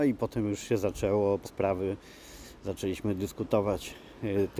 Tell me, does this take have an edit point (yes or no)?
yes